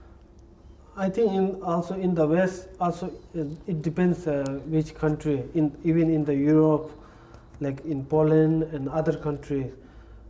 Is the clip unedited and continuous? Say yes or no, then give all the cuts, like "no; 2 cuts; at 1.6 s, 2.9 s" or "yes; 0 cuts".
yes; 0 cuts